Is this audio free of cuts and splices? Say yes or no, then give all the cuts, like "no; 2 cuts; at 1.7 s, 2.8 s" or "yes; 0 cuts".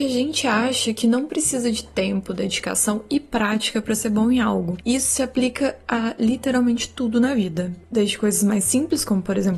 yes; 0 cuts